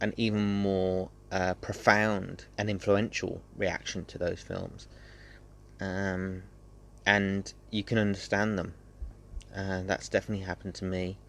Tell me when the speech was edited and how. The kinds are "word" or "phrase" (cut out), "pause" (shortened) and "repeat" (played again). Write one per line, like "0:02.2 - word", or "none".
0:02.5 - pause